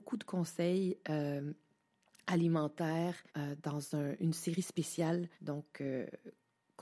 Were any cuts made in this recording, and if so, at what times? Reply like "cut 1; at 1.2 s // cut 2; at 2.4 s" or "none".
cut 1; at 3.3 s // cut 2; at 5.3 s